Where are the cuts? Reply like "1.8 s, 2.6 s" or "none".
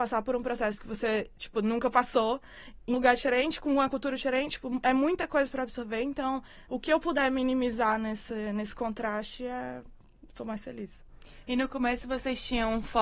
2.9 s